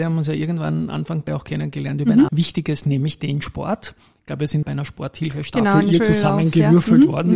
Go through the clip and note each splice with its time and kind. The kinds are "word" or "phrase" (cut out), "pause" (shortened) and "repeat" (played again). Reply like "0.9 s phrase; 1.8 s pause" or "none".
1.3 s word; 2.3 s word; 2.8 s word; 4.6 s word; 6.0 s word